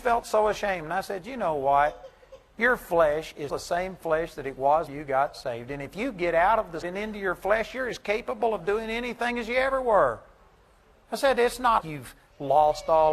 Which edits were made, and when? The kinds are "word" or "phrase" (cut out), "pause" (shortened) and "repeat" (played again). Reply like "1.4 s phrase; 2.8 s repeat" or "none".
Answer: 3.5 s word; 4.9 s word; 6.8 s word; 11.8 s word